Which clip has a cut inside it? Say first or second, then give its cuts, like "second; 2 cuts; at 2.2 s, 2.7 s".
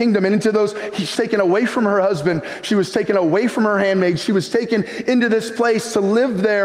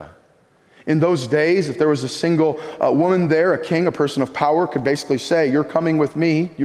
first; 1 cut; at 1.1 s